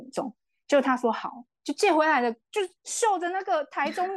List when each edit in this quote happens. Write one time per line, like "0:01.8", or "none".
0:02.8